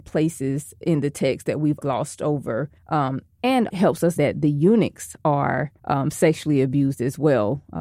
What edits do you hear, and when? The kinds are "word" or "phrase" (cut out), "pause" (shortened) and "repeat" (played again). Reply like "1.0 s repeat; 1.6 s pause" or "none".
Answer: 1.8 s word; 2.8 s pause; 3.7 s word; 4.2 s word; 5.8 s pause